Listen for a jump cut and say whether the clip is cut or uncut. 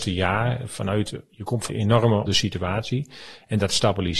cut